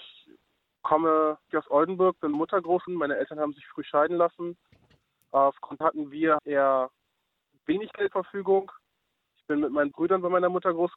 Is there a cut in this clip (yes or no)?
yes